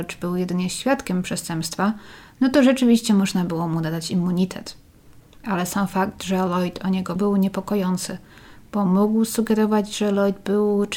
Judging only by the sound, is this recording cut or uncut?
cut